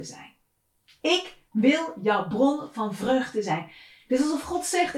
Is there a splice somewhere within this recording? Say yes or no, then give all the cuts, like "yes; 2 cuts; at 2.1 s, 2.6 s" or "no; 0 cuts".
no; 0 cuts